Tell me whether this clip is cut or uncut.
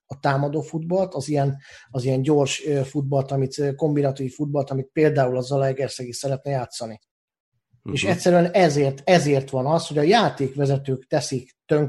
uncut